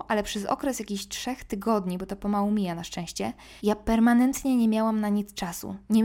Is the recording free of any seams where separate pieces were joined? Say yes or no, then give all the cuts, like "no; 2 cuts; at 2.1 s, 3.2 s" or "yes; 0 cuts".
no; 1 cut; at 3.6 s